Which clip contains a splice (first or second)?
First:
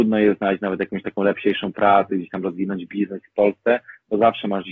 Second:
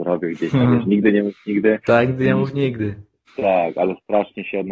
second